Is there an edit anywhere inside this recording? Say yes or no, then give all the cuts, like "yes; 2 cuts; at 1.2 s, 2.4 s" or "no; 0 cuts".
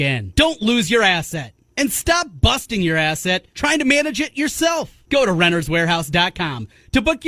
no; 0 cuts